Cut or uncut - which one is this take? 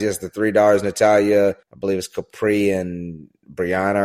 cut